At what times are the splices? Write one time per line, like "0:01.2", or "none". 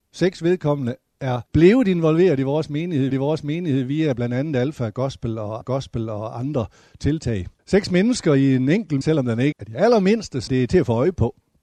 0:01.5
0:03.1
0:05.6
0:07.6
0:09.0
0:09.5
0:10.5